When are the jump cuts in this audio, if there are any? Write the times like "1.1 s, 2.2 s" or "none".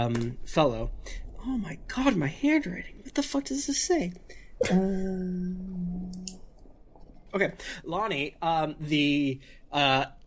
7.3 s